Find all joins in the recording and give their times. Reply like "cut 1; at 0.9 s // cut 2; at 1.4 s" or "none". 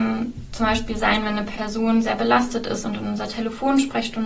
none